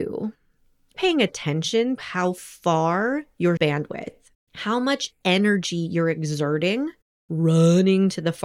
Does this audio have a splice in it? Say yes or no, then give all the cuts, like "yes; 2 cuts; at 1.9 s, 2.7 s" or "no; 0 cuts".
yes; 4 cuts; at 0.9 s, 2.0 s, 3.6 s, 4.4 s